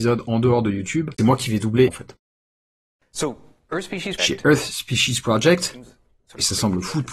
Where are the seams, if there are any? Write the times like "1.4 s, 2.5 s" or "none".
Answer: 1.2 s, 1.9 s, 4.2 s